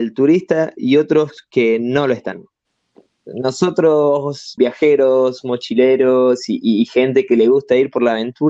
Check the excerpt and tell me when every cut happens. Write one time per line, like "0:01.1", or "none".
0:04.6